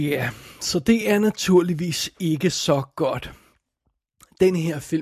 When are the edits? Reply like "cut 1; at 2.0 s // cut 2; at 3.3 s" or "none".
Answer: none